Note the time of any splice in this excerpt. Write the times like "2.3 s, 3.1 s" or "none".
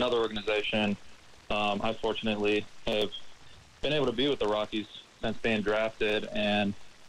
none